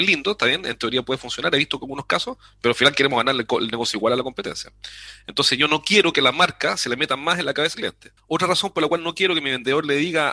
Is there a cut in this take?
yes; 1 cut; at 7.7 s

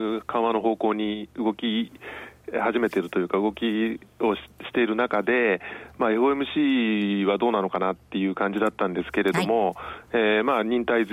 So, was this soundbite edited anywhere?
no; 0 cuts

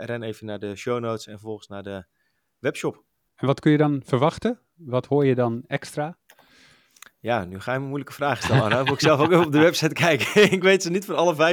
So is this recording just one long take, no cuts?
yes; 0 cuts

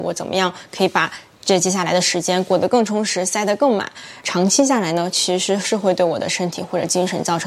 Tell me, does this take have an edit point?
no; 0 cuts

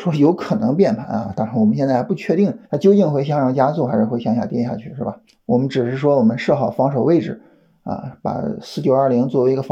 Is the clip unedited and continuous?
no; 2 cuts; at 2.6 s, 5.3 s

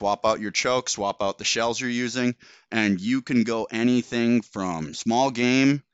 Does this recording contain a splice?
no; 0 cuts

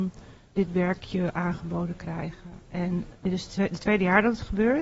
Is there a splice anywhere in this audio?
yes; 1 cut; at 3.1 s

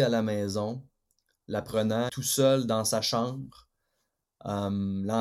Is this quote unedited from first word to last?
no; 1 cut; at 2.1 s

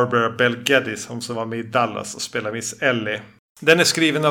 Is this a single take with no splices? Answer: yes; 0 cuts

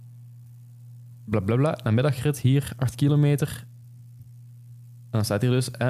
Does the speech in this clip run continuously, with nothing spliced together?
yes; 0 cuts

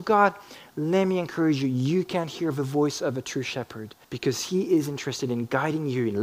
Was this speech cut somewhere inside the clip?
yes; 1 cut; at 4.0 s

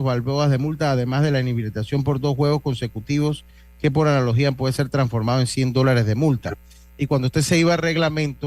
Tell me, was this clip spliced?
no; 0 cuts

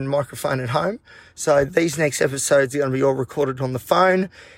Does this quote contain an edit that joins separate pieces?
no; 0 cuts

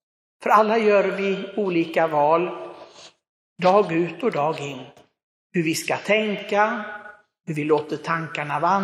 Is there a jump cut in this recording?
no; 0 cuts

